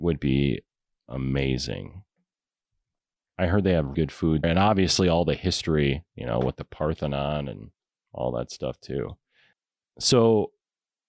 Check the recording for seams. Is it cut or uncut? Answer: cut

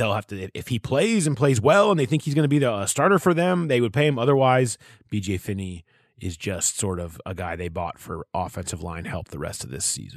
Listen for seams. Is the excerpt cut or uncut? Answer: uncut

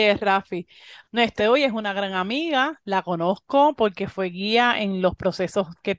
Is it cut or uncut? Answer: cut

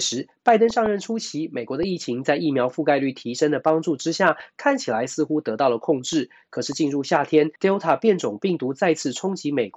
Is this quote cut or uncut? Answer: cut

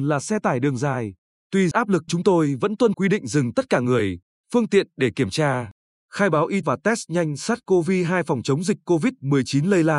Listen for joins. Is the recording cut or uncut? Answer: cut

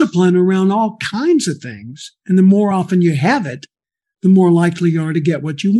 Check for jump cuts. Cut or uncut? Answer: uncut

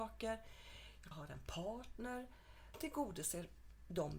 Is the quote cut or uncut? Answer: cut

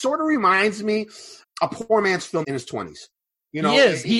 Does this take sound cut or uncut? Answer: cut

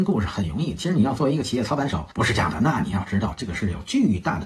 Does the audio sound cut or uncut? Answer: cut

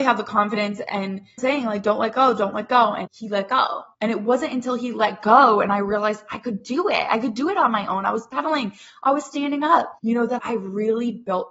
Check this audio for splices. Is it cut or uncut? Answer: cut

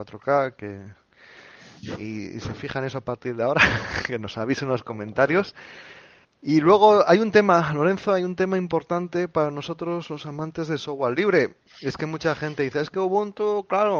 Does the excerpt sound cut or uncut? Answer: cut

